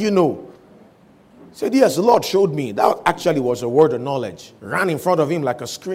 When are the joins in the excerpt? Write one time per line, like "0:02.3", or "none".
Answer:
0:04.6